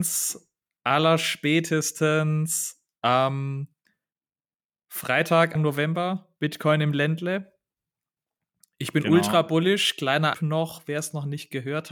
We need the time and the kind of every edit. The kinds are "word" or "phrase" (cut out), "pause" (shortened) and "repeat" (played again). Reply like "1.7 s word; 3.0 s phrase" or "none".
5.6 s word; 10.3 s word

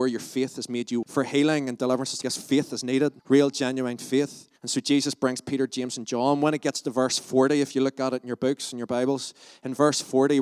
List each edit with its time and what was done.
1.0 s word; 2.2 s word; 3.2 s pause; 4.6 s pause

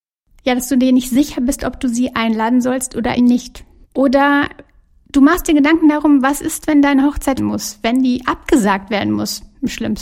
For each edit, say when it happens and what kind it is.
3.2 s word; 3.8 s pause; 7.4 s phrase

